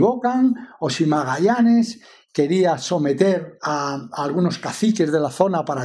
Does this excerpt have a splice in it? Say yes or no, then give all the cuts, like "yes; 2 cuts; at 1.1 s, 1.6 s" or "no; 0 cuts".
no; 0 cuts